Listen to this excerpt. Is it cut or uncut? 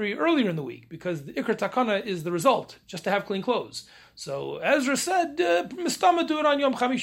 uncut